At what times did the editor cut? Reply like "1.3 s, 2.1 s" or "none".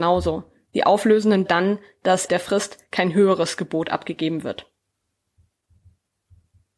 1.5 s, 2.3 s

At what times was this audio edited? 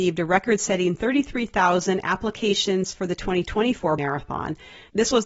4.0 s

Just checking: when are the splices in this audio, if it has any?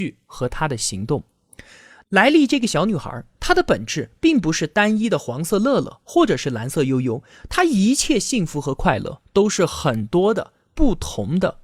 none

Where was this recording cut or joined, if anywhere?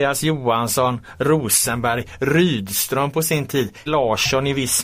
3.9 s

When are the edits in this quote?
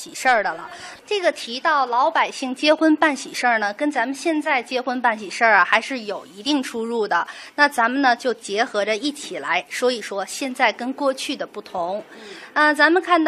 1.0 s

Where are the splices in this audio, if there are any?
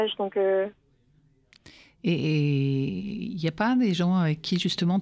none

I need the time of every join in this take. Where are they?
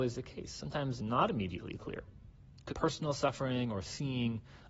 1.0 s, 2.7 s

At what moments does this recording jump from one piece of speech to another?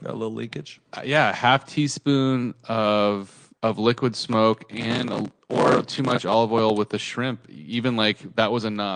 3.6 s

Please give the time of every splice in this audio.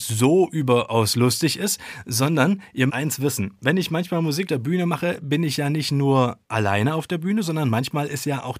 2.9 s, 4.5 s, 6.4 s

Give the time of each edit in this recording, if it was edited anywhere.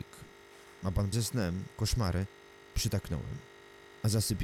1.1 s

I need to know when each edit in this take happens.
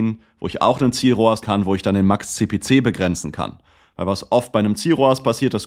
1.4 s

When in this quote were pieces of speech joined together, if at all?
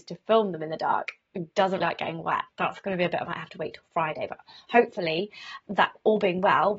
1.8 s, 2.5 s, 3.3 s

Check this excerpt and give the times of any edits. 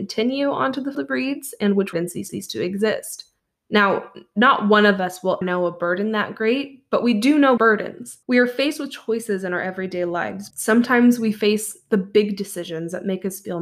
0.9 s, 1.9 s, 2.3 s, 3.4 s, 5.4 s, 7.6 s, 8.2 s, 10.5 s

